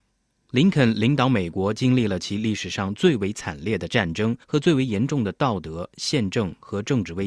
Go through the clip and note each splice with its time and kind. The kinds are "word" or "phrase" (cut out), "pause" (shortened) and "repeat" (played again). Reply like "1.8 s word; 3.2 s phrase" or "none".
4.4 s pause